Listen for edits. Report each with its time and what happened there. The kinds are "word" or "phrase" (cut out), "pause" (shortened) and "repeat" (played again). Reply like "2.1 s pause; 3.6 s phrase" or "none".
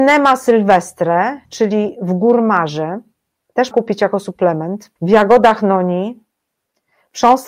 1.4 s pause; 3.7 s word; 5.0 s pause